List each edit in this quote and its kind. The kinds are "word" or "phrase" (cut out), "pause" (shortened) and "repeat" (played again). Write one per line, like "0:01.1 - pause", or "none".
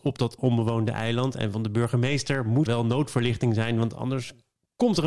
0:02.7 - word